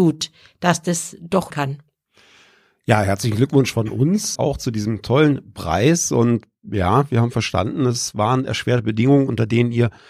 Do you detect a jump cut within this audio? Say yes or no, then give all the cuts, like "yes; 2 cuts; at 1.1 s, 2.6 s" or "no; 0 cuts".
yes; 2 cuts; at 1.5 s, 4.4 s